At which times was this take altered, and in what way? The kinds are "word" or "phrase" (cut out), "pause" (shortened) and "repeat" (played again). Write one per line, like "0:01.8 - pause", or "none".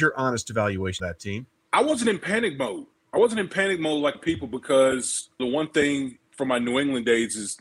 0:01.0 - word
0:04.1 - phrase
0:05.4 - phrase